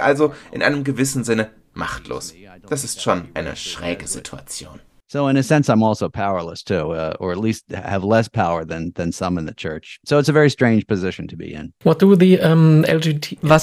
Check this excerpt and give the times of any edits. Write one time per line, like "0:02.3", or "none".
none